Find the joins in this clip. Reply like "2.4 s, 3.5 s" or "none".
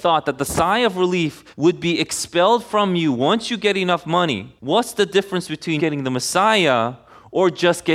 1.5 s, 4.6 s, 5.8 s